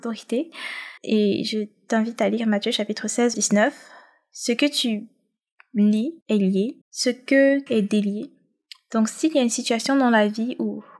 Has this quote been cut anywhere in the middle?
yes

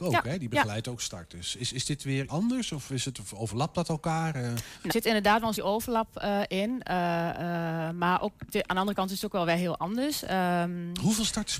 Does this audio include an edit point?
yes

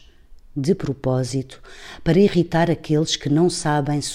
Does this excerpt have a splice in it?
no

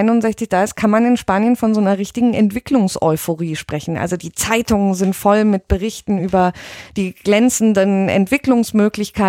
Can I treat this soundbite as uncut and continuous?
yes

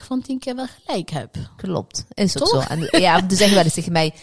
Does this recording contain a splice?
no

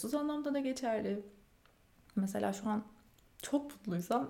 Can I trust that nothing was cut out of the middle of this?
yes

